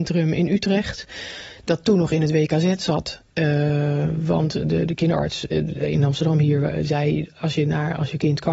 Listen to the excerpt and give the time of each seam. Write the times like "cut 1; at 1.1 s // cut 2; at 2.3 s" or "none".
none